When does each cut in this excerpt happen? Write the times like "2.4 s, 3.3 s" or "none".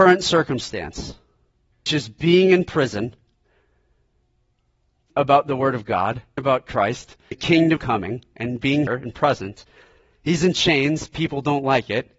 1.9 s, 5.1 s, 6.4 s, 7.3 s, 7.8 s, 8.9 s